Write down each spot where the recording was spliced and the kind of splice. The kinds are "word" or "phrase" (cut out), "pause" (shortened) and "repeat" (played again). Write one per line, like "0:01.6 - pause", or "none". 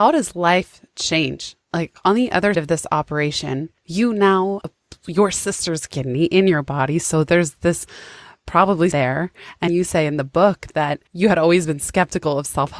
0:02.5 - word
0:03.8 - pause
0:04.6 - word
0:08.9 - phrase
0:09.7 - word
0:11.1 - pause